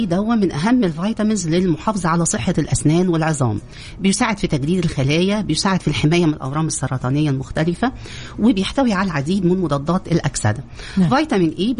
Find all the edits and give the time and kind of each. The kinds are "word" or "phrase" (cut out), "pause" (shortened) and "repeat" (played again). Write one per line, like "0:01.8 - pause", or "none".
none